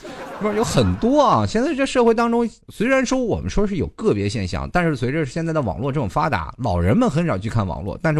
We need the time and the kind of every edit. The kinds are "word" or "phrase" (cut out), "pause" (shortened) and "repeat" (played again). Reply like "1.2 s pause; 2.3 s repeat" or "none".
2.6 s pause